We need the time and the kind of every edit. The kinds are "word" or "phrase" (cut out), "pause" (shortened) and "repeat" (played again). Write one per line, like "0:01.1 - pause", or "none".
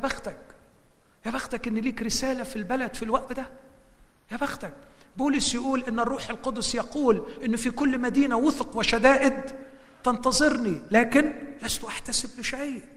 0:03.3 - word